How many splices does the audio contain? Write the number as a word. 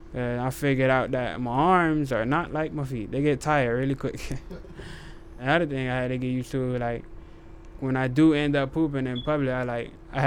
one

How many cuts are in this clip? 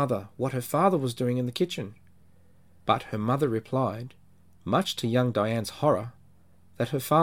zero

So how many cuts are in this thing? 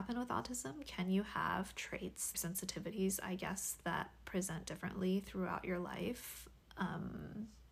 one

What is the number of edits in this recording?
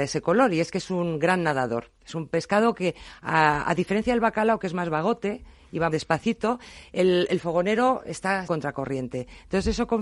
two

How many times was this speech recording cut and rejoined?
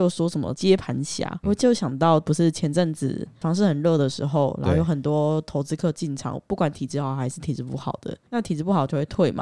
one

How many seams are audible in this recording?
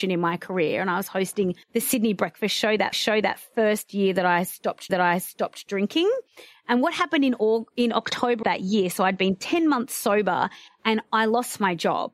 four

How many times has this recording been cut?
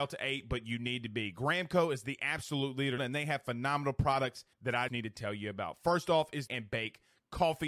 four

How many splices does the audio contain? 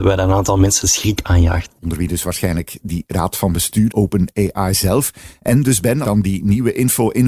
two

